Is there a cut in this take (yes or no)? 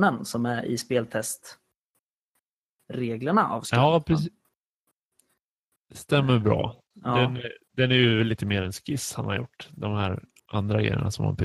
yes